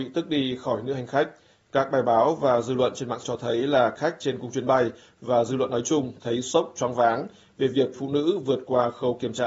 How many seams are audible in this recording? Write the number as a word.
three